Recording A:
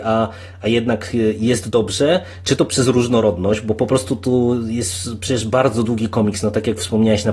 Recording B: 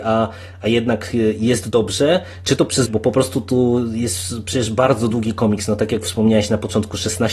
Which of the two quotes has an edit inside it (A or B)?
B